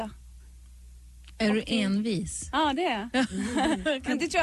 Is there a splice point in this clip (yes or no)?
no